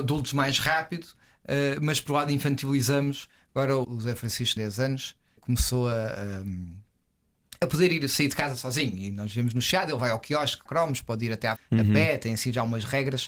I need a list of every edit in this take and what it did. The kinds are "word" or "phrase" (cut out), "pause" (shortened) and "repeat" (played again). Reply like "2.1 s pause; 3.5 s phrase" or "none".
2.1 s word; 3.8 s word; 4.6 s word; 5.4 s word; 10.7 s word; 11.6 s word